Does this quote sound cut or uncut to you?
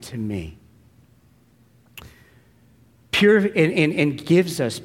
uncut